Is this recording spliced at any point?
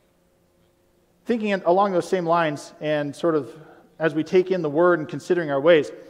no; 0 cuts

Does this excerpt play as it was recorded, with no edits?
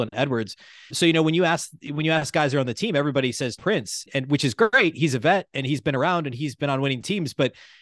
no; 3 cuts; at 0.9 s, 3.6 s, 4.1 s

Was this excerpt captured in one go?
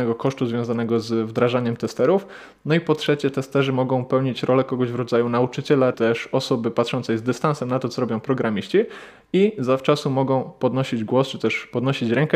no; 1 cut; at 5.9 s

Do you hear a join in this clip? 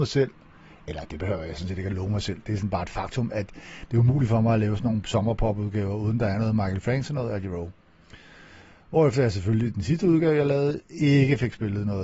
no; 0 cuts

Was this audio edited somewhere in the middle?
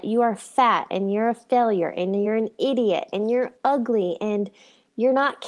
no; 0 cuts

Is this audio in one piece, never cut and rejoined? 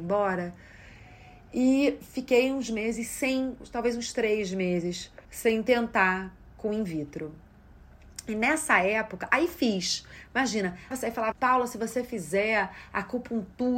no; 3 cuts; at 5.2 s, 10.9 s, 11.3 s

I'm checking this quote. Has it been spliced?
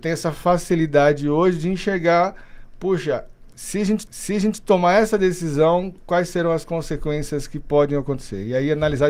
yes; 1 cut; at 4.1 s

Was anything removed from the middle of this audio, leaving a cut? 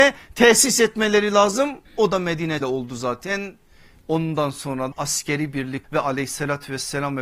yes; 4 cuts; at 1.9 s, 2.6 s, 4.9 s, 5.8 s

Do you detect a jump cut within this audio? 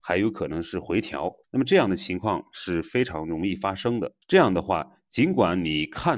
yes; 2 cuts; at 1.4 s, 4.2 s

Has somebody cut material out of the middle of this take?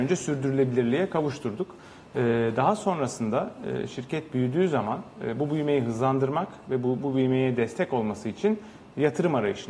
no; 0 cuts

